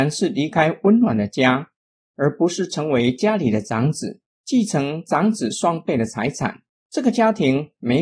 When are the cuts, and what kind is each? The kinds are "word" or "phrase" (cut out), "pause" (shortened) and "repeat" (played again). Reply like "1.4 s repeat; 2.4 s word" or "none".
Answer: none

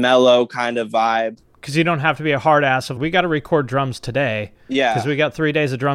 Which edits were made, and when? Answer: 3.0 s word

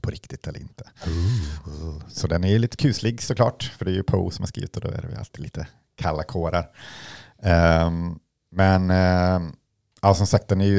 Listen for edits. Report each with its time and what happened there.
none

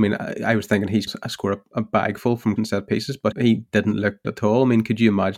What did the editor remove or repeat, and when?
1.1 s word; 2.6 s word; 3.3 s word; 4.2 s word

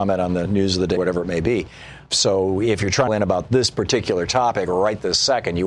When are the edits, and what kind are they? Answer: 1.0 s word; 3.1 s phrase

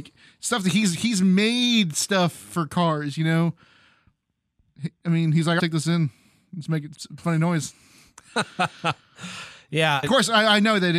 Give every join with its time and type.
5.6 s phrase; 6.9 s word; 10.0 s word

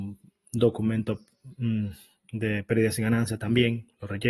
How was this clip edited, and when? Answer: none

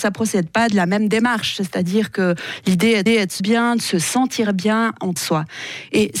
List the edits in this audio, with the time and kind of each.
3.1 s repeat; 3.4 s phrase; 5.2 s phrase

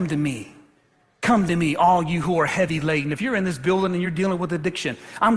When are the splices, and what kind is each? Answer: none

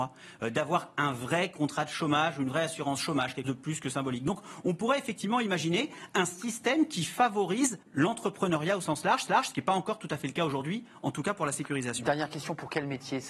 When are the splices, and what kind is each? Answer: 3.4 s word; 7.8 s pause; 9.3 s repeat

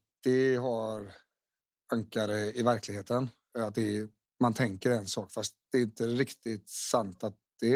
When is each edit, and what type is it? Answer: none

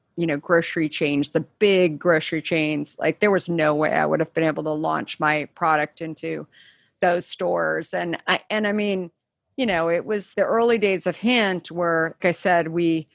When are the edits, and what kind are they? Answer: 10.3 s word; 12.2 s word

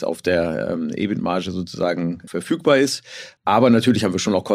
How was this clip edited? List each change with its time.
2.3 s phrase; 3.4 s pause

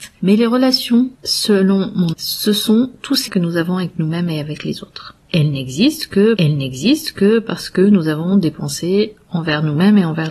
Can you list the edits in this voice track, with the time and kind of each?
1.1 s pause; 2.1 s phrase; 3.3 s word; 5.2 s pause; 6.4 s repeat

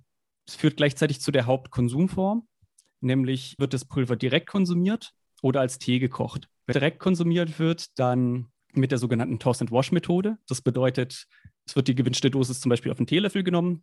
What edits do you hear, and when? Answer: 3.6 s word; 6.7 s word

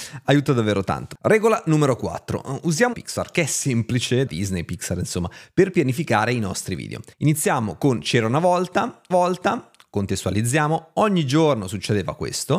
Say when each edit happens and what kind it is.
2.9 s phrase; 4.3 s word; 7.1 s pause; 9.1 s repeat

